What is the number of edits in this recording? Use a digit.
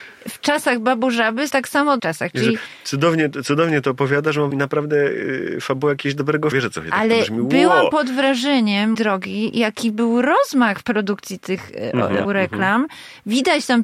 7